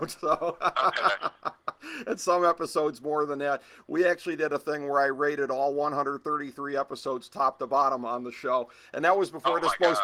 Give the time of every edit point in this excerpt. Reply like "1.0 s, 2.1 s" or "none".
none